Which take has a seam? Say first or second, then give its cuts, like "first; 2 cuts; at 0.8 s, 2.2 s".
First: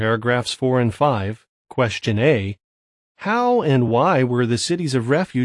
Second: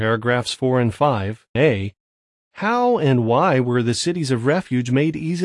second; 1 cut; at 1.6 s